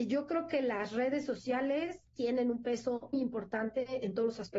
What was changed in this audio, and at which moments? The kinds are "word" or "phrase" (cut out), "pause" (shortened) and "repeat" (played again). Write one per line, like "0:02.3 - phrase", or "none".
0:03.1 - word